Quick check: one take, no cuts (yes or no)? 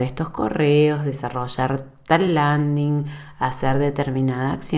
yes